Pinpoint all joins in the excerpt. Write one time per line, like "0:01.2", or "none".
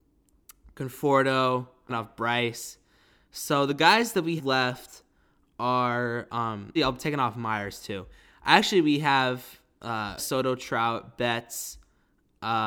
0:01.9
0:04.4
0:06.8
0:10.2